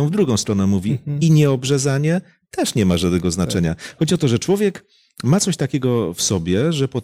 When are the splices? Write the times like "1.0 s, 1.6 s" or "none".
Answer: none